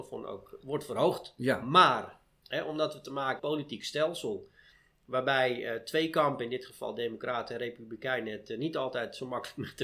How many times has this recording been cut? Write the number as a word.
one